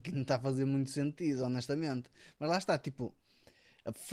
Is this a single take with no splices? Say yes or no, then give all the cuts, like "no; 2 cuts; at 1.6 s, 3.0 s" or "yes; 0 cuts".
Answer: yes; 0 cuts